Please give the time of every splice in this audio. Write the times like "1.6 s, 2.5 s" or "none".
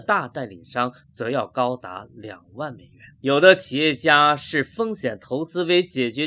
3.1 s